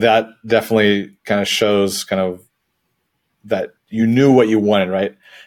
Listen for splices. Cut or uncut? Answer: uncut